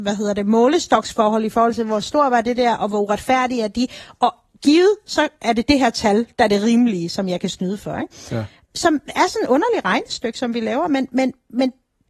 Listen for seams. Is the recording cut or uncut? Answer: uncut